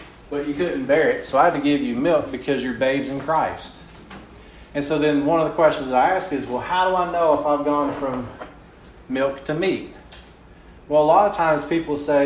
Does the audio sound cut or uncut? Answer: uncut